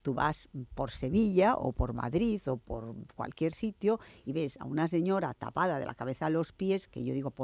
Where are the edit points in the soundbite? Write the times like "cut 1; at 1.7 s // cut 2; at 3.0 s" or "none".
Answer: none